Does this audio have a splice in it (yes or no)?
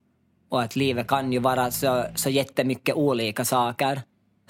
no